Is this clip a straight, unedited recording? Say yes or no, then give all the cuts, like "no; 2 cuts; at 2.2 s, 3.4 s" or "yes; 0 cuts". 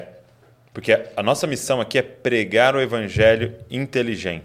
yes; 0 cuts